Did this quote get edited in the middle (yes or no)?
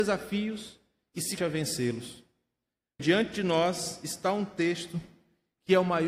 yes